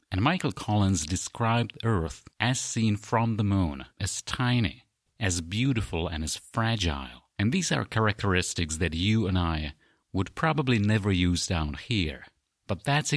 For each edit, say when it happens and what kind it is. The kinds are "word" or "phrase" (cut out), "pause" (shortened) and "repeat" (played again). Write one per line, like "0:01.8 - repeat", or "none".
0:02.3 - pause
0:03.9 - pause
0:05.1 - pause
0:07.3 - pause